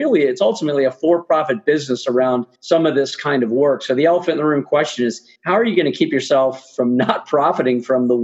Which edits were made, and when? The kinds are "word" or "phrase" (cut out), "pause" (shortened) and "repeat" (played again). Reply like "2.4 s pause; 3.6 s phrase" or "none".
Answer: 2.5 s pause; 5.4 s pause